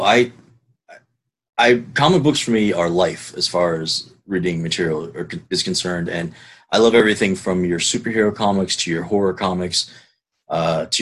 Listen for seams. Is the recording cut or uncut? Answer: uncut